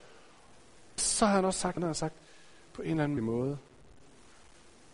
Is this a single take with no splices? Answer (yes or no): no